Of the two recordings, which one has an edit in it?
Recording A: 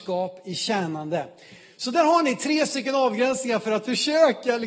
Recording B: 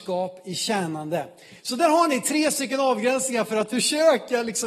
B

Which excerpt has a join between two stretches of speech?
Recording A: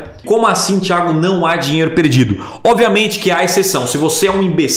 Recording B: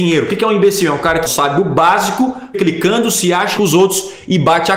B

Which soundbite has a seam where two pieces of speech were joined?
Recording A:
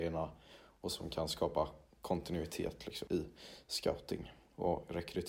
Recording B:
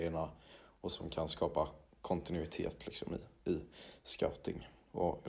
A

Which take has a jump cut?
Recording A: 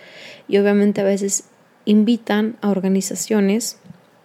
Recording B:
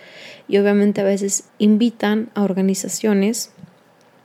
B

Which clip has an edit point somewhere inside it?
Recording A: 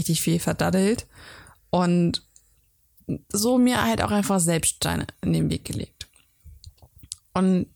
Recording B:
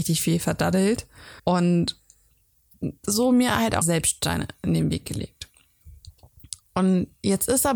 B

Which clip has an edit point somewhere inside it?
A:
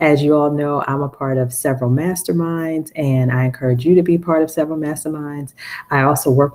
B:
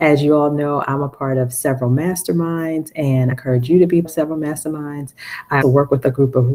B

